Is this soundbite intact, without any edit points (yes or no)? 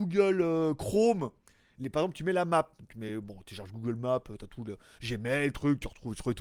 yes